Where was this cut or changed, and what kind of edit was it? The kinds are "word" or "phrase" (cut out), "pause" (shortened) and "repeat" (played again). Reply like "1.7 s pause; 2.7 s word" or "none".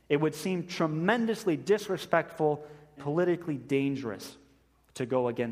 3.0 s word